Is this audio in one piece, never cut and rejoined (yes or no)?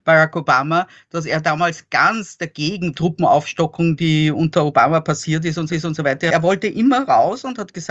no